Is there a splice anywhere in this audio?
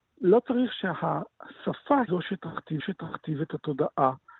yes; 2 cuts; at 2.1 s, 2.8 s

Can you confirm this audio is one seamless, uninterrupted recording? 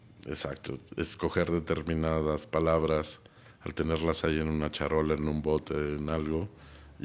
yes; 0 cuts

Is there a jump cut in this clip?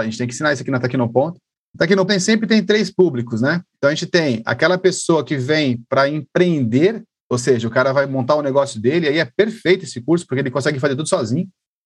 yes; 1 cut; at 2.1 s

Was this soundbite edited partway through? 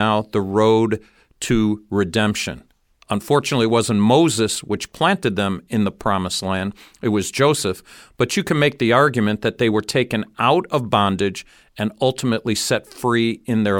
no; 0 cuts

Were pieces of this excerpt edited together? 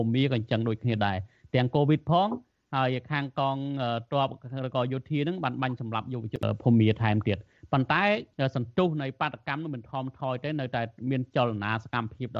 no; 0 cuts

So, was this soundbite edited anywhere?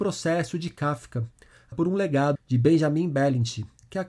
yes; 2 cuts; at 1.7 s, 2.3 s

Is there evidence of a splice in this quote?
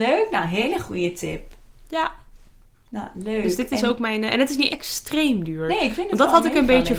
yes; 1 cut; at 4.7 s

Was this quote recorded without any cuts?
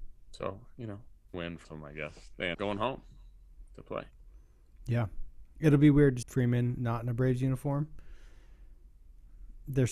no; 4 cuts; at 1.3 s, 1.6 s, 2.5 s, 6.2 s

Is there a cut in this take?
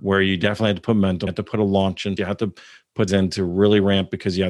yes; 3 cuts; at 1.3 s, 2.2 s, 3.1 s

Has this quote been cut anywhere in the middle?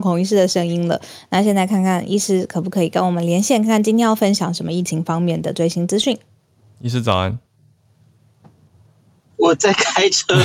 no; 0 cuts

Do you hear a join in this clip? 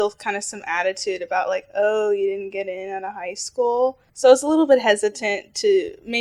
yes; 1 cut; at 4.1 s

